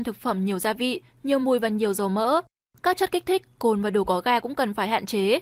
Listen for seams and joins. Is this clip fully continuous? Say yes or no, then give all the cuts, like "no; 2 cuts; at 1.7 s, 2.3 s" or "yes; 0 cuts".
yes; 0 cuts